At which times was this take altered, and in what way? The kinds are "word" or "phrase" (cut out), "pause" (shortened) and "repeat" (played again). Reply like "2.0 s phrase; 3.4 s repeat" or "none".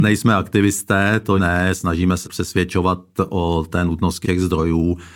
1.4 s word; 2.2 s word; 4.2 s word